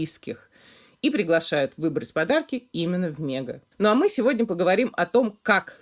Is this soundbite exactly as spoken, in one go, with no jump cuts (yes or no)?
no